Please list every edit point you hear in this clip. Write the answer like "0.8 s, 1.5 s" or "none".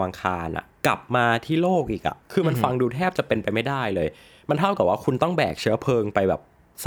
2.2 s